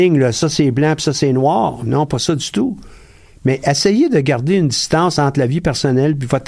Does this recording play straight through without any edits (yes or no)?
yes